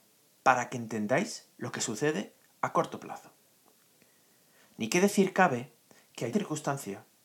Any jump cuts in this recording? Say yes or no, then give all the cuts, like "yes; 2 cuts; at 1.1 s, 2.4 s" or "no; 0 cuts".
yes; 1 cut; at 6.3 s